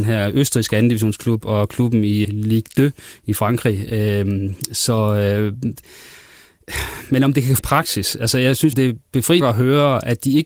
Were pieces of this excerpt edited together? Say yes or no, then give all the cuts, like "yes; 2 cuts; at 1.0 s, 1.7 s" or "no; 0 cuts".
yes; 4 cuts; at 2.2 s, 7.6 s, 8.7 s, 9.4 s